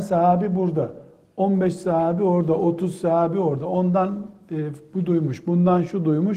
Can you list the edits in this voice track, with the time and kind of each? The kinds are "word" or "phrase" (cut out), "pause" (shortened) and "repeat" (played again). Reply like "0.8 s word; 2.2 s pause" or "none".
none